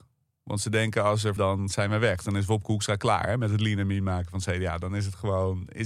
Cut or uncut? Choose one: cut